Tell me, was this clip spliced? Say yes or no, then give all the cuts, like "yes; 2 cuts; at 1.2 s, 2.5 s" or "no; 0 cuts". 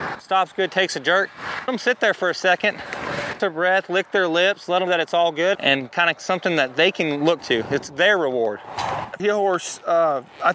yes; 6 cuts; at 1.7 s, 3.4 s, 4.9 s, 5.5 s, 7.4 s, 9.2 s